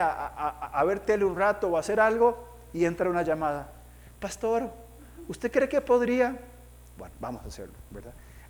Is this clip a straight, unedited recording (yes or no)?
yes